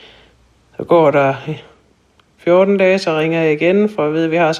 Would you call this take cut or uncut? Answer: uncut